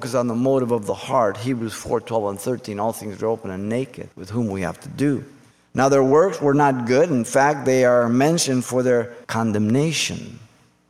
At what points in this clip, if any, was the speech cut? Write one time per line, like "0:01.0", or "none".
0:04.1
0:05.5
0:09.2